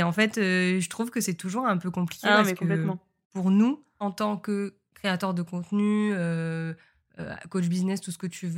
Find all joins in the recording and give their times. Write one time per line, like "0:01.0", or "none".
none